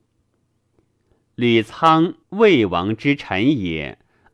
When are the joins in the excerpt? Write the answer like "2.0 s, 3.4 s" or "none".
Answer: 2.2 s